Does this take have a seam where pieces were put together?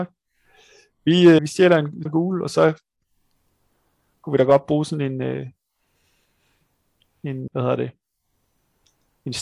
yes; 3 cuts; at 1.4 s, 2.1 s, 7.5 s

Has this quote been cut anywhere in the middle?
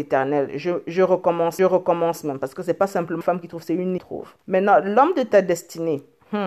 yes; 4 cuts; at 1.6 s, 3.2 s, 4.0 s, 4.4 s

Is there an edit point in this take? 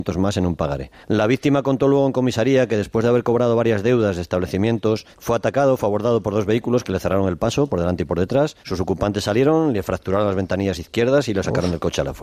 yes; 3 cuts; at 1.0 s, 5.1 s, 8.6 s

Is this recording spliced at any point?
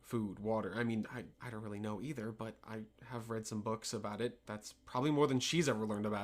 yes; 2 cuts; at 1.3 s, 4.5 s

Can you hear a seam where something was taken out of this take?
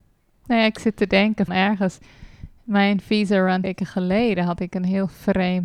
yes; 2 cuts; at 1.5 s, 3.6 s

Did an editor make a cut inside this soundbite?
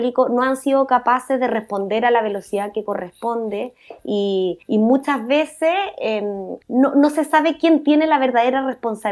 yes; 2 cuts; at 4.6 s, 6.6 s

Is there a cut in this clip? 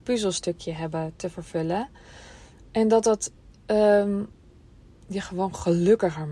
no; 0 cuts

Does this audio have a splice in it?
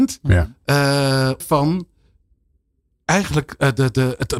yes; 1 cut; at 1.4 s

